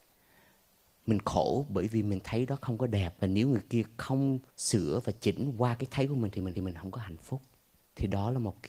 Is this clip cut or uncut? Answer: cut